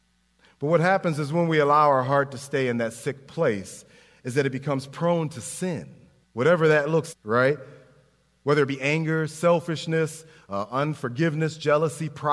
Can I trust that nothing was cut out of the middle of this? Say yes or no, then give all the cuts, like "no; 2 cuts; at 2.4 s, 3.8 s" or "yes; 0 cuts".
no; 2 cuts; at 6.2 s, 7.1 s